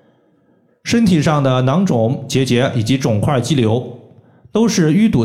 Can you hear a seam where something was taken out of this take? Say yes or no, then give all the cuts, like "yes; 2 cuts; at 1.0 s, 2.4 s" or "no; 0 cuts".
no; 0 cuts